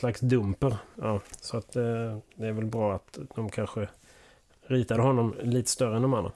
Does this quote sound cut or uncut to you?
uncut